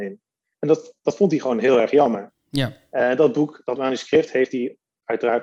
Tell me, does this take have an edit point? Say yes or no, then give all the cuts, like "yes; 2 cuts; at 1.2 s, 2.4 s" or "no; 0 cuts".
no; 0 cuts